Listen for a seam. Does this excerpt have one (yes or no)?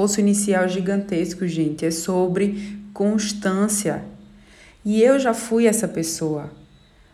no